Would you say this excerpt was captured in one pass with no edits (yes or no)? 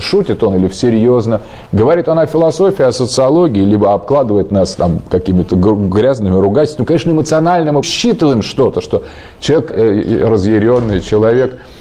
no